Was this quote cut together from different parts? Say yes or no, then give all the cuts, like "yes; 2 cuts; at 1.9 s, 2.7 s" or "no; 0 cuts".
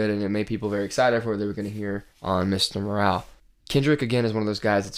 yes; 2 cuts; at 2.1 s, 3.4 s